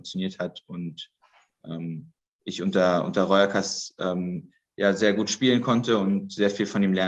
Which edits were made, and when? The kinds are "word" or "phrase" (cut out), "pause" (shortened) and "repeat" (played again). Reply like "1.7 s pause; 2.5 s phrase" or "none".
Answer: 2.2 s pause